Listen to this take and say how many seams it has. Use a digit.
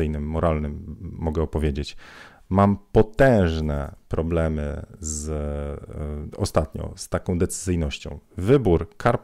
0